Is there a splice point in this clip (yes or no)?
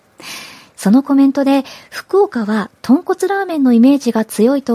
no